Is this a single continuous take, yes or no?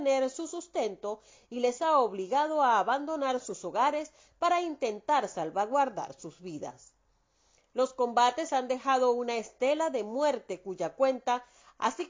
yes